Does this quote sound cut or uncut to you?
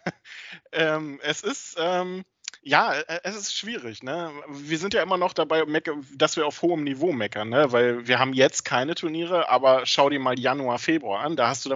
cut